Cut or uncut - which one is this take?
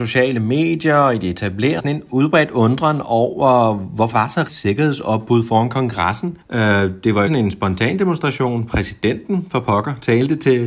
cut